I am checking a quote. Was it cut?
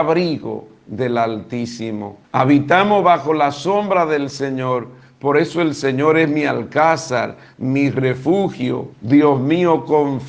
yes; 2 cuts; at 2.2 s, 8.9 s

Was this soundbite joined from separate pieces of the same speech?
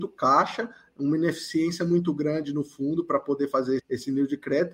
yes; 1 cut; at 3.8 s

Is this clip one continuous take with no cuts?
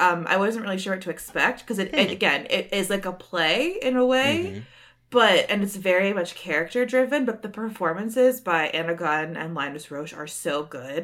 yes; 0 cuts

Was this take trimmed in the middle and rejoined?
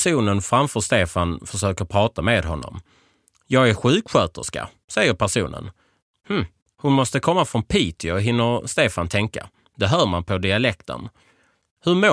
no; 0 cuts

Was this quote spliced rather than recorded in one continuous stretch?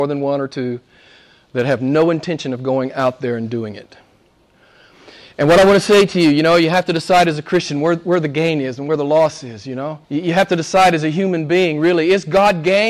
yes; 1 cut; at 10.0 s

